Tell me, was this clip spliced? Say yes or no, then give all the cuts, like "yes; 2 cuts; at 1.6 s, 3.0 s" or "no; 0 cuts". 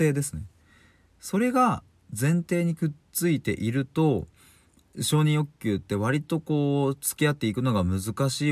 no; 0 cuts